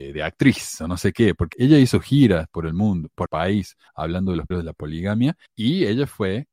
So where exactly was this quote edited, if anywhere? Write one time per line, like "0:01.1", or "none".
0:01.5
0:03.3
0:03.9
0:04.5
0:05.5